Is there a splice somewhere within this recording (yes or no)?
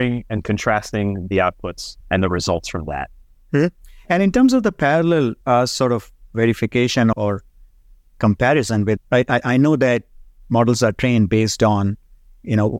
yes